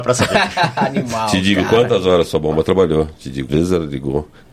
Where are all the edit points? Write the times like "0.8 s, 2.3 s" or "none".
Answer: 3.5 s